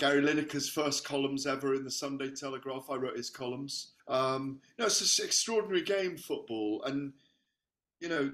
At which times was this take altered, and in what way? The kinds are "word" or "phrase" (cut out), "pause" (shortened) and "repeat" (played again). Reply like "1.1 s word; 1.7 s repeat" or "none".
4.0 s pause